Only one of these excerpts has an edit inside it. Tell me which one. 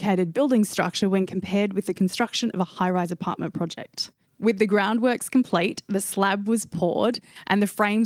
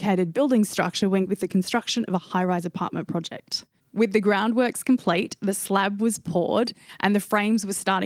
second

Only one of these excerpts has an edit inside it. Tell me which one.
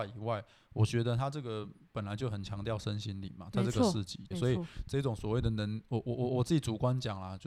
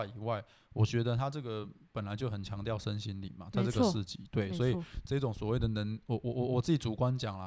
first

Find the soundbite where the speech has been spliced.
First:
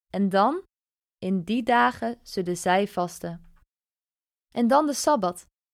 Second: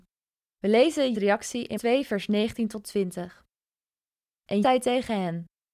second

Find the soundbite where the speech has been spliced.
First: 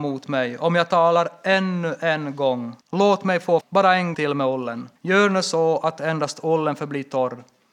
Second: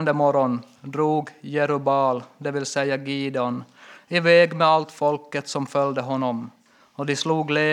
first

